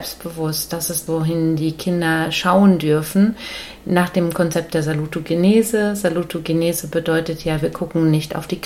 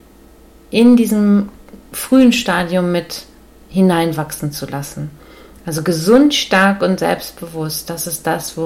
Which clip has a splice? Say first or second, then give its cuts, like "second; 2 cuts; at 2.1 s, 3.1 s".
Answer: first; 1 cut; at 1.1 s